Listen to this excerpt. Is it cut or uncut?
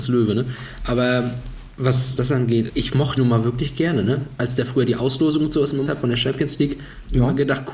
cut